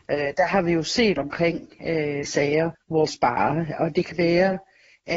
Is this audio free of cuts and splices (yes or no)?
no